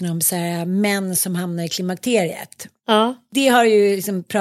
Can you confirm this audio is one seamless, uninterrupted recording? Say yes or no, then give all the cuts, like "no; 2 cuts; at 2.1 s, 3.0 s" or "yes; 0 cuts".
yes; 0 cuts